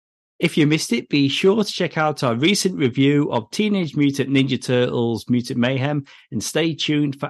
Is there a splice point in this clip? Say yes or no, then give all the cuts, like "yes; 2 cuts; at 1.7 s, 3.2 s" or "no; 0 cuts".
no; 0 cuts